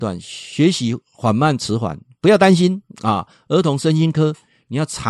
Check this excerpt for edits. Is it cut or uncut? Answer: cut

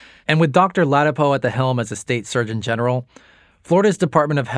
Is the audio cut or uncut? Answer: uncut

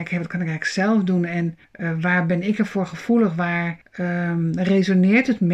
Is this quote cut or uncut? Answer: cut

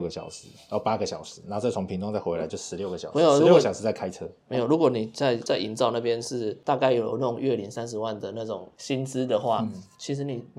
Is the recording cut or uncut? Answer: uncut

